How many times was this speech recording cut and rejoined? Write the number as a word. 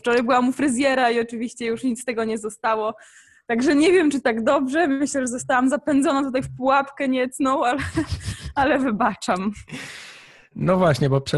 zero